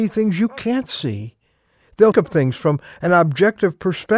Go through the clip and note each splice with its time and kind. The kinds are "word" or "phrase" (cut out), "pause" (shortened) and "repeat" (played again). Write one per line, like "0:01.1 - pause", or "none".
0:02.1 - word